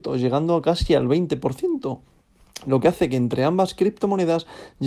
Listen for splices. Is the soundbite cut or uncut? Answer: uncut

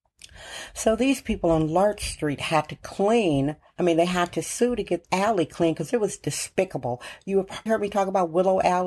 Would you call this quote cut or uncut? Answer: cut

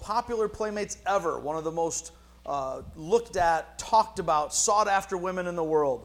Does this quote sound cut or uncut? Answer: uncut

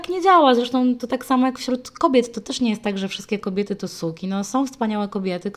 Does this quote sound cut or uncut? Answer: uncut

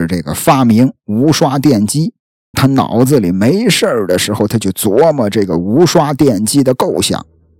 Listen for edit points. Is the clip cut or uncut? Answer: cut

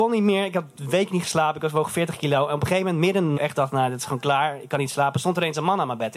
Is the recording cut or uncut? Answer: cut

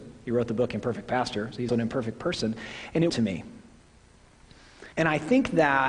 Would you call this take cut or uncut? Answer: cut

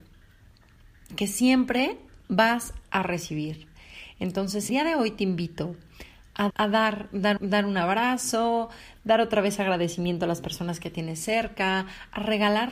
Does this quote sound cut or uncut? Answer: cut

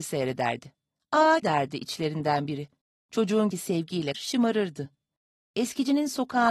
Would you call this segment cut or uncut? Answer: cut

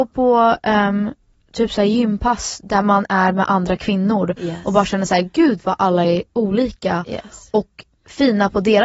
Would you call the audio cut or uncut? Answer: uncut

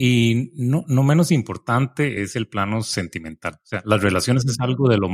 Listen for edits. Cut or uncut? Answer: uncut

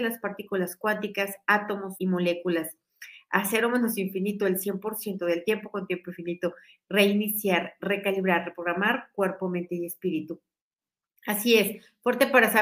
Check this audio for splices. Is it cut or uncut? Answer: cut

